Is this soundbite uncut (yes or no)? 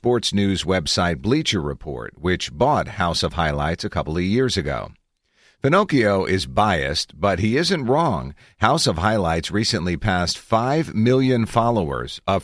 yes